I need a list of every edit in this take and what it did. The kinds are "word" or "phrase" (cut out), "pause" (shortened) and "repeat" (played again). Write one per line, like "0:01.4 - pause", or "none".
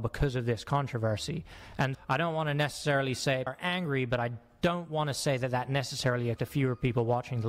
0:01.9 - word
0:03.5 - word
0:06.4 - word